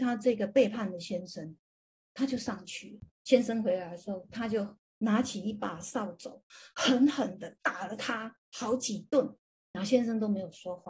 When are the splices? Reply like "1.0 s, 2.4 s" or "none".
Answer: 7.6 s